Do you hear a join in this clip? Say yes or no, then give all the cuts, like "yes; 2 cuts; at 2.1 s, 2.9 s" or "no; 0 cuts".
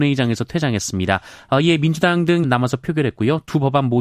yes; 1 cut; at 2.4 s